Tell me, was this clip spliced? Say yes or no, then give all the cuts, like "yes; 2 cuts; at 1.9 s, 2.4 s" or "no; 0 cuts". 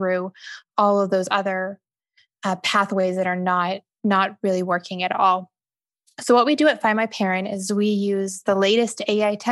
no; 0 cuts